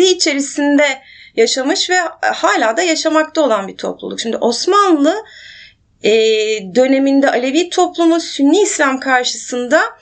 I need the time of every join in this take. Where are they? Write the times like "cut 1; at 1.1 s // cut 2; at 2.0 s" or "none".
none